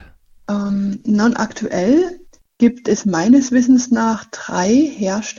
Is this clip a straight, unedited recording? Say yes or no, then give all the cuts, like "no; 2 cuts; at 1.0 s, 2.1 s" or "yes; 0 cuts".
yes; 0 cuts